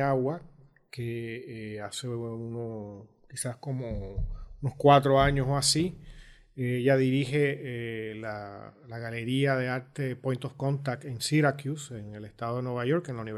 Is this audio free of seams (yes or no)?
yes